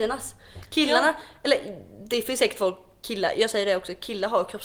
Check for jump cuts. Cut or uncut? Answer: uncut